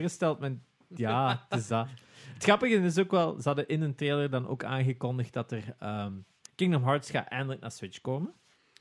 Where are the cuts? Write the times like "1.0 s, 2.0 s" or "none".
6.4 s